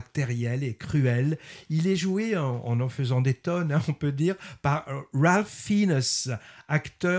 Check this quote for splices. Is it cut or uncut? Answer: uncut